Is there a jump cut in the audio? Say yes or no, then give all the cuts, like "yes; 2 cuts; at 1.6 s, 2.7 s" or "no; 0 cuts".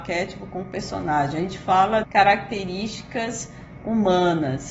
yes; 1 cut; at 2.0 s